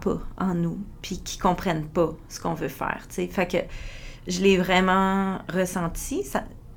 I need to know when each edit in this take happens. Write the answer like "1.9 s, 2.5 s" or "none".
none